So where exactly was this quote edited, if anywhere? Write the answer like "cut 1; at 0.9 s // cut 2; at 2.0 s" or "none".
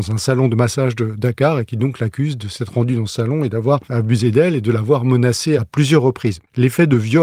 none